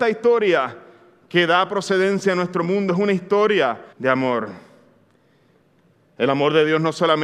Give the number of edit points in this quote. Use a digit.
1